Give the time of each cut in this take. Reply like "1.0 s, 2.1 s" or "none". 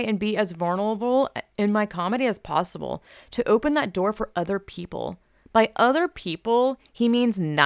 none